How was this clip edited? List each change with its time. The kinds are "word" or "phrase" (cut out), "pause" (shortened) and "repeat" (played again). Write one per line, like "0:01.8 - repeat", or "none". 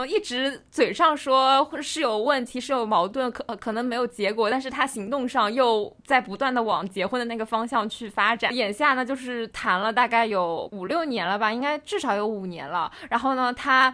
0:06.0 - pause
0:08.5 - phrase